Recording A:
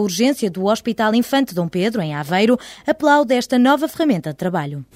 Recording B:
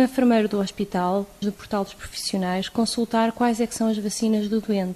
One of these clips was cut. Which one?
B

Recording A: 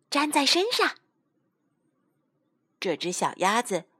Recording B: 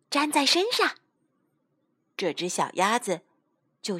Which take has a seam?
B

